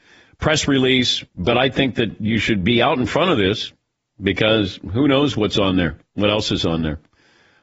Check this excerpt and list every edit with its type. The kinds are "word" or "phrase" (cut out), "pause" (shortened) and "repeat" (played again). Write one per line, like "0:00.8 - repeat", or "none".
none